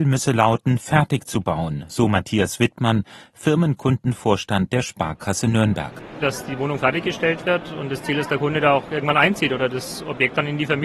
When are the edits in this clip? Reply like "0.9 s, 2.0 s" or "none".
none